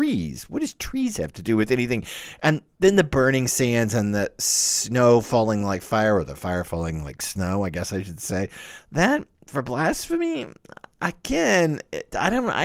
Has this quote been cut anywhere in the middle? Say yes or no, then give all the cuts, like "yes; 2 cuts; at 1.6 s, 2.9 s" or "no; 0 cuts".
no; 0 cuts